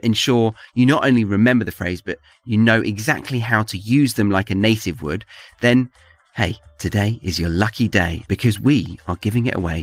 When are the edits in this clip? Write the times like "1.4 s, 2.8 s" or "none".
none